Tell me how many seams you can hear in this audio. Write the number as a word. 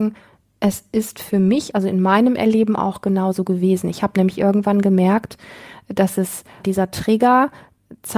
one